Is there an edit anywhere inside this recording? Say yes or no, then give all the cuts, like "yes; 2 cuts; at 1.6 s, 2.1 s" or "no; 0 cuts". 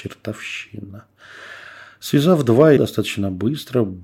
yes; 1 cut; at 2.8 s